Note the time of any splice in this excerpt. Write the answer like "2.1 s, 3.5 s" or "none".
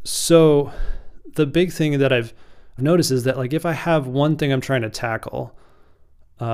2.8 s

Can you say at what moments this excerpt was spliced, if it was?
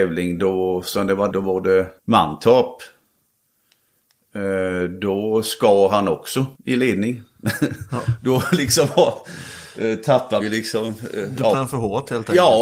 1.3 s, 2.0 s, 6.5 s, 10.4 s, 11.5 s

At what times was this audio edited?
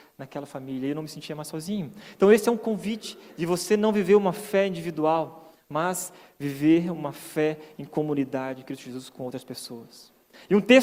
none

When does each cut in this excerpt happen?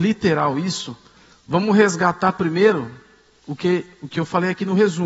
none

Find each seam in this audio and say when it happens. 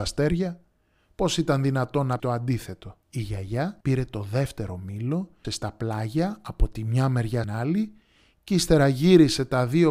2.2 s, 3.0 s, 3.8 s, 5.4 s, 7.4 s

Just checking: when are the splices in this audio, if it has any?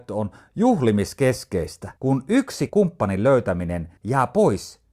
2.0 s, 2.7 s, 4.0 s

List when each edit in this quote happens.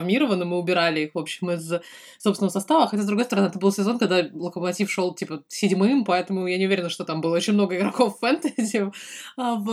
none

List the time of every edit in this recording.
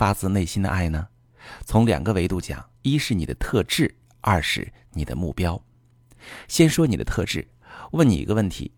2.7 s

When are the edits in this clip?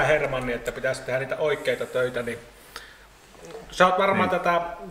none

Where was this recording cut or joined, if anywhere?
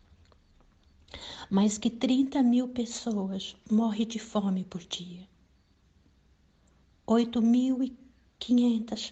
none

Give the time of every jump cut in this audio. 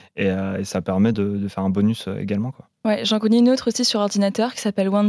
none

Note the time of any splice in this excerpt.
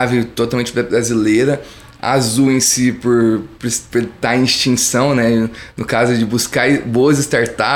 none

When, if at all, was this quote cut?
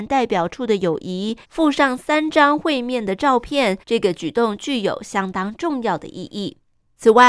1.4 s, 3.8 s

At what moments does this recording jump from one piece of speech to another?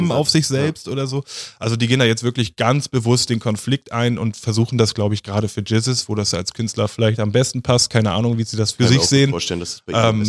none

